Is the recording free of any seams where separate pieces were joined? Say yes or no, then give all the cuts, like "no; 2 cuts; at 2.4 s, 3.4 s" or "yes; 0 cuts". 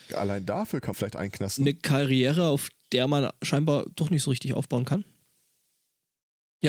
no; 1 cut; at 0.9 s